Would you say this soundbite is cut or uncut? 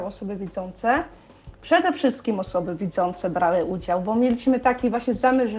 uncut